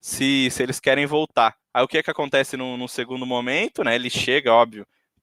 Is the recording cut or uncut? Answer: cut